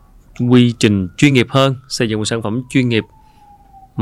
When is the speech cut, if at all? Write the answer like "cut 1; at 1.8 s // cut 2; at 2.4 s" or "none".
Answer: none